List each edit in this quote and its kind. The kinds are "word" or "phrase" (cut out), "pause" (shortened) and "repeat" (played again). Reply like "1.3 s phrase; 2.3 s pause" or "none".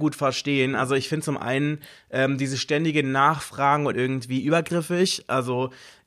3.9 s phrase